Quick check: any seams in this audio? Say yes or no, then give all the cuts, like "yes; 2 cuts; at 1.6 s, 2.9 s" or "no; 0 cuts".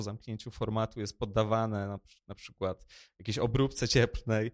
no; 0 cuts